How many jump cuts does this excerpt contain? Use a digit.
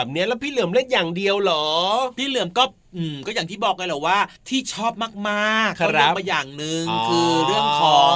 1